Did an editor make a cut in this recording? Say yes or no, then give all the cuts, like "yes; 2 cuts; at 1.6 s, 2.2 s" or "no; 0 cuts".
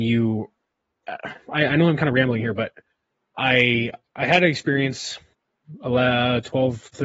no; 0 cuts